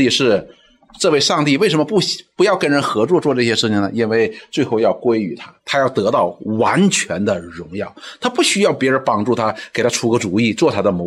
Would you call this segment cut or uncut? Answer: cut